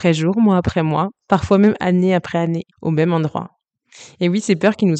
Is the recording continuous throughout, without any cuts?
no; 1 cut; at 2.7 s

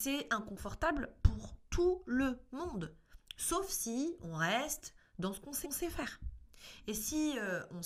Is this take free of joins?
no; 1 cut; at 5.6 s

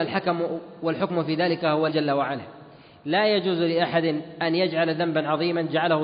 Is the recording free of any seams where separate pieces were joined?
no; 1 cut; at 1.9 s

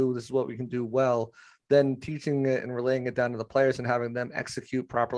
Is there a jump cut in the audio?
no; 0 cuts

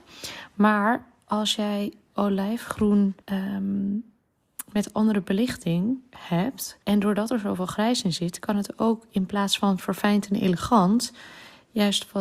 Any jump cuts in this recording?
yes; 2 cuts; at 3.2 s, 6.8 s

